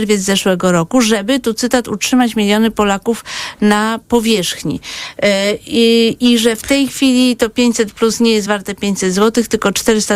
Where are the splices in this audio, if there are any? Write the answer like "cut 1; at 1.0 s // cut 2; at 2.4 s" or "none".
none